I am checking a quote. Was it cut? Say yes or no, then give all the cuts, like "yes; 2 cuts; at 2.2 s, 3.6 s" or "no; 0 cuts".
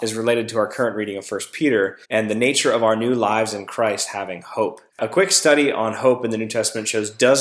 yes; 2 cuts; at 2.0 s, 4.9 s